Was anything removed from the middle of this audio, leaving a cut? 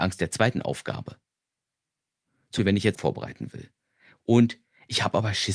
yes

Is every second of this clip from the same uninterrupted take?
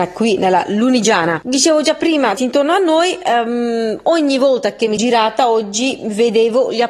no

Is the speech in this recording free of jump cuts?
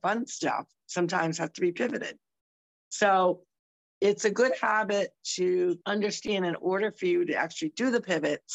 no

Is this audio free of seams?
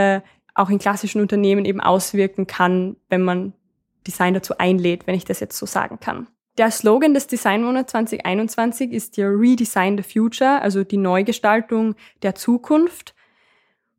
yes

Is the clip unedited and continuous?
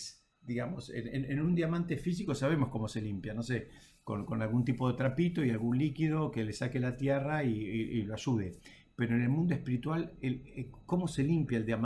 yes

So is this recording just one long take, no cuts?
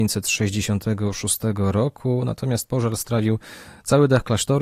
yes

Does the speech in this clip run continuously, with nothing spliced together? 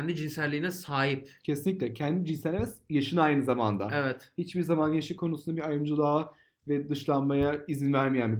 yes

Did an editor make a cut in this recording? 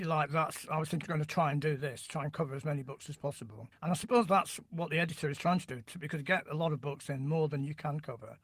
yes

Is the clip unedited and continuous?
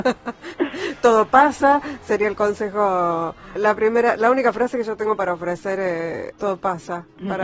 no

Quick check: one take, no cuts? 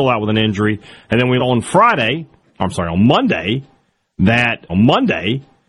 no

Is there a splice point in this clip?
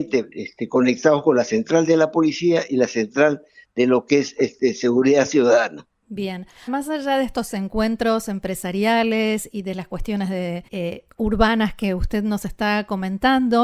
yes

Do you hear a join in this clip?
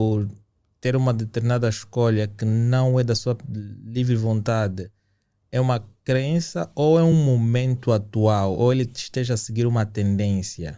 no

